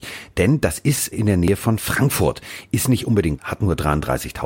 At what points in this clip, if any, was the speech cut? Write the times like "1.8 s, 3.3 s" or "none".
1.1 s, 3.4 s